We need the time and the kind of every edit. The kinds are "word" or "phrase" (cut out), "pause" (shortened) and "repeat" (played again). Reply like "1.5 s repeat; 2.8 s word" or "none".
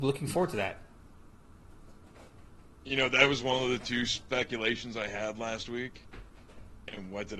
none